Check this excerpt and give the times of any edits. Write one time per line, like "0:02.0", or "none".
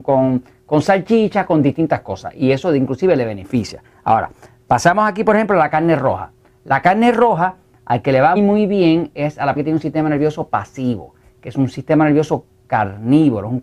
0:08.4
0:09.6